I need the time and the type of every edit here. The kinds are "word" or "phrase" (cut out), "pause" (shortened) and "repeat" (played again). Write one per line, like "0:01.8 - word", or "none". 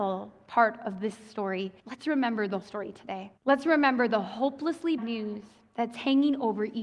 0:01.8 - pause
0:02.6 - word
0:03.4 - pause
0:05.0 - word